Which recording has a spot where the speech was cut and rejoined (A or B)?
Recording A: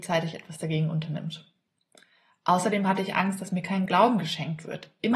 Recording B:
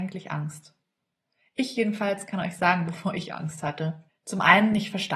B